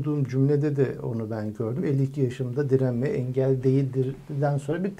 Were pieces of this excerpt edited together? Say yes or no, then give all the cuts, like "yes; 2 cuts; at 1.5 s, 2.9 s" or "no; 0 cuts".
no; 0 cuts